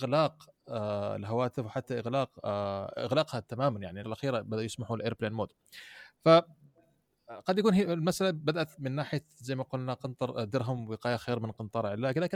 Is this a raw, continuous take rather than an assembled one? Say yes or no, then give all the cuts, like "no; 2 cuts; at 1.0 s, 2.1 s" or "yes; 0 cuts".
no; 1 cut; at 4.0 s